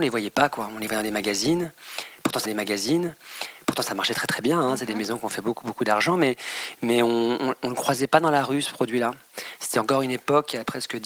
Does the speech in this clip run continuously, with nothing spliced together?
no; 1 cut; at 2.5 s

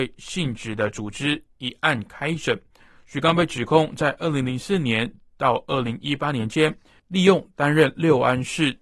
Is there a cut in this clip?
no; 0 cuts

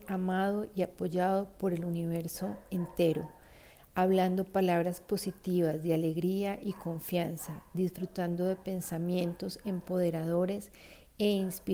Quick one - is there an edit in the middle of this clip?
no; 0 cuts

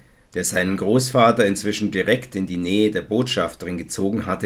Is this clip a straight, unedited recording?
yes; 0 cuts

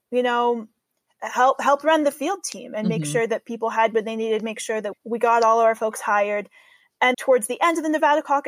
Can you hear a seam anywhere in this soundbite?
yes; 2 cuts; at 4.9 s, 7.1 s

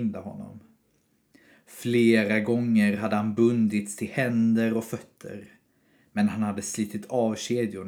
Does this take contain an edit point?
no; 0 cuts

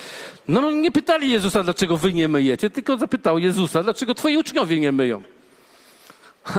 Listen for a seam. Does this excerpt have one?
no; 0 cuts

